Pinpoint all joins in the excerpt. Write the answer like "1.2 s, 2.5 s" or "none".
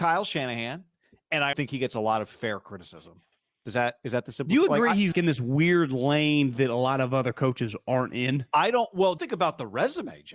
1.5 s, 5.1 s, 9.2 s